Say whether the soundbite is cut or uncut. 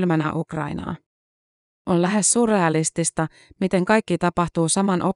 uncut